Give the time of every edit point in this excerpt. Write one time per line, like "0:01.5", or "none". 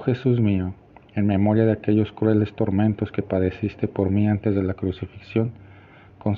none